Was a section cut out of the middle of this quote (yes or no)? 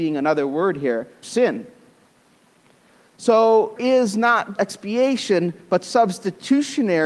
yes